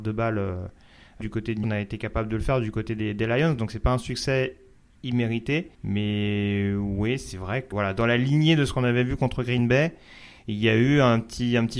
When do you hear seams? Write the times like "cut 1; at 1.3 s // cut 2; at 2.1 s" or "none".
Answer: cut 1; at 1.2 s // cut 2; at 1.6 s // cut 3; at 5.7 s // cut 4; at 7.7 s